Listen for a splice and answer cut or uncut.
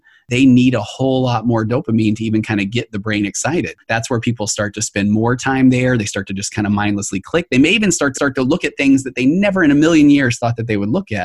cut